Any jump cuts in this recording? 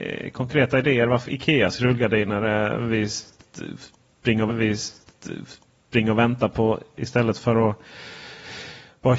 yes; 2 cuts; at 1.3 s, 4.5 s

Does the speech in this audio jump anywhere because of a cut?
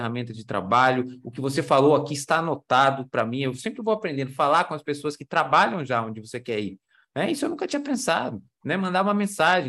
no; 0 cuts

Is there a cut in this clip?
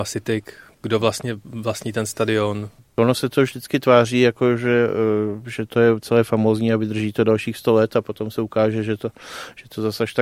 yes; 1 cut; at 2.8 s

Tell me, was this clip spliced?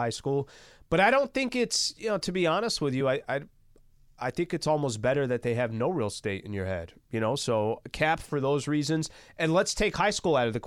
no; 0 cuts

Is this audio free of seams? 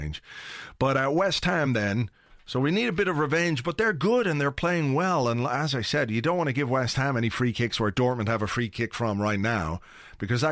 yes; 0 cuts

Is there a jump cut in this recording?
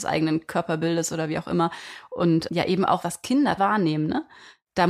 yes; 2 cuts; at 3.0 s, 3.6 s

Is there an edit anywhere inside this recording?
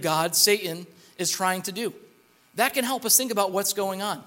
no; 0 cuts

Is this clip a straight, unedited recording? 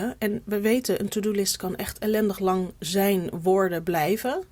no; 1 cut; at 2.8 s

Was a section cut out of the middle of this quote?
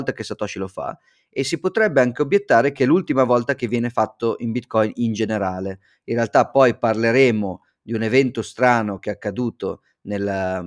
no; 0 cuts

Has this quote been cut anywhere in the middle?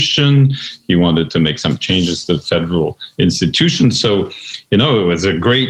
no; 0 cuts

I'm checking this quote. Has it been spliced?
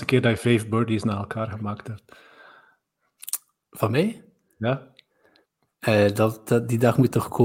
no; 0 cuts

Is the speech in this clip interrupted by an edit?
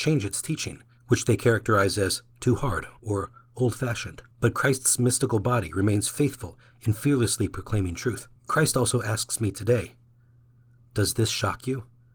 yes; 4 cuts; at 1.0 s, 3.0 s, 4.3 s, 8.4 s

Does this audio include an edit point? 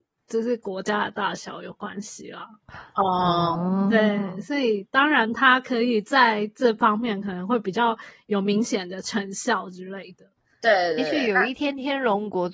no; 0 cuts

